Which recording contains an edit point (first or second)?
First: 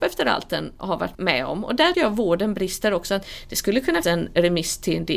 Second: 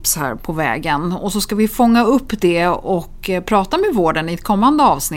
first